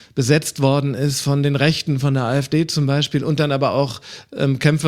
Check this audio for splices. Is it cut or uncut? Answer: uncut